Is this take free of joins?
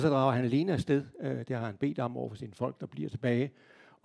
yes; 0 cuts

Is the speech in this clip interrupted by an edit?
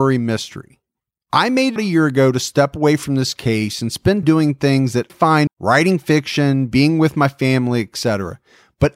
yes; 4 cuts; at 1.8 s, 4.2 s, 5.1 s, 5.5 s

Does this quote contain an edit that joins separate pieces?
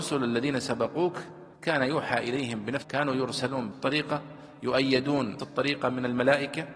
yes; 4 cuts; at 1.5 s, 2.8 s, 3.7 s, 5.4 s

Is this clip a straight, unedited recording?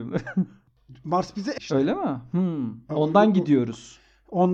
no; 1 cut; at 1.6 s

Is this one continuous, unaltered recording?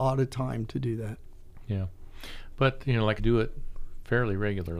no; 1 cut; at 3.2 s

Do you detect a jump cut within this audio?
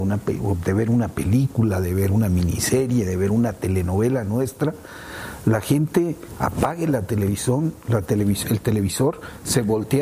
no; 0 cuts

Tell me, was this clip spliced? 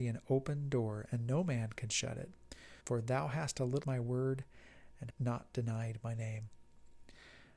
yes; 3 cuts; at 2.8 s, 3.8 s, 5.1 s

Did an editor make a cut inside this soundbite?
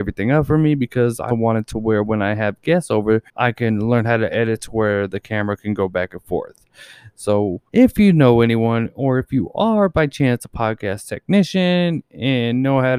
yes; 3 cuts; at 1.3 s, 3.3 s, 7.7 s

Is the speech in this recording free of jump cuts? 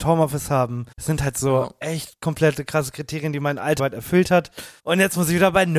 no; 3 cuts; at 0.9 s, 3.8 s, 4.8 s

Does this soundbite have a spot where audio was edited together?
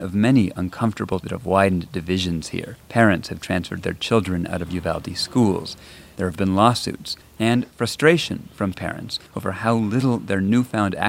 yes; 5 cuts; at 1.2 s, 2.8 s, 7.2 s, 8.7 s, 9.3 s

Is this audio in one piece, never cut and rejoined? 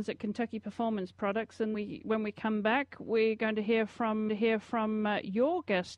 no; 2 cuts; at 1.7 s, 4.3 s

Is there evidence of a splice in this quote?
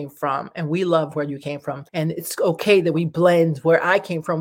yes; 1 cut; at 1.9 s

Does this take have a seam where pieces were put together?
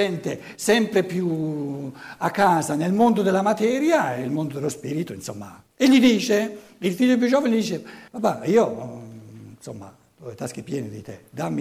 yes; 2 cuts; at 5.7 s, 8.1 s

